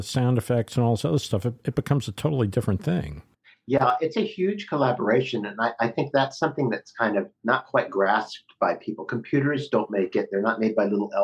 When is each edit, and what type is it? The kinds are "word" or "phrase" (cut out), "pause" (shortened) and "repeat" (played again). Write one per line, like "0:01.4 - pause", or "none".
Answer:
0:03.3 - pause
0:07.4 - pause